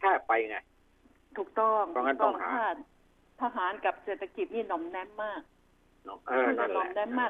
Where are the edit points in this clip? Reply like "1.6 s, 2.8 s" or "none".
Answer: none